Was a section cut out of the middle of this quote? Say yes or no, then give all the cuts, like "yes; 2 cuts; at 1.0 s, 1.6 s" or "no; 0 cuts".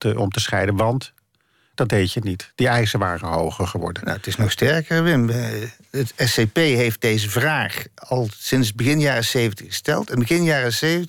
no; 0 cuts